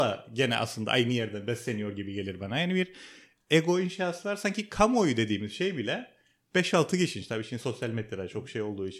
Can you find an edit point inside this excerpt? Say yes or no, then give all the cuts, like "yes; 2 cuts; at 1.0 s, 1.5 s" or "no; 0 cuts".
no; 0 cuts